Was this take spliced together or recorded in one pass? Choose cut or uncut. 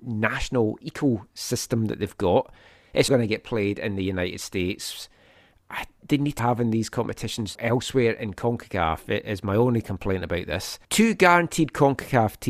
cut